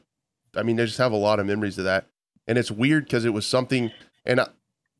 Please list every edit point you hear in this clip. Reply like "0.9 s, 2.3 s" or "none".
none